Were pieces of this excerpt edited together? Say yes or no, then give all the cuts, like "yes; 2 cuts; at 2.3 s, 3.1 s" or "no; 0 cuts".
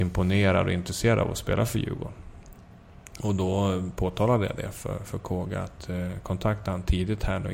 no; 0 cuts